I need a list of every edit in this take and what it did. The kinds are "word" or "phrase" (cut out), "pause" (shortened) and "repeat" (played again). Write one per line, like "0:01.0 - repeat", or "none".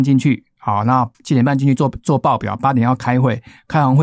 0:01.1 - pause